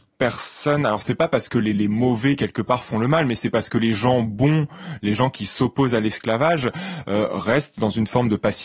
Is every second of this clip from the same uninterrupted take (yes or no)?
yes